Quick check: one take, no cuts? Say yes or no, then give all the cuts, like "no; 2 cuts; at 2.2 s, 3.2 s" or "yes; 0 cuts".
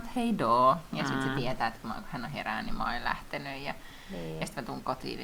yes; 0 cuts